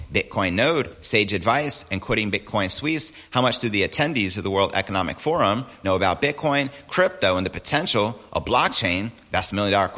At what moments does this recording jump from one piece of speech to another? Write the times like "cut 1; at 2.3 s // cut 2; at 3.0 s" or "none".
cut 1; at 5.8 s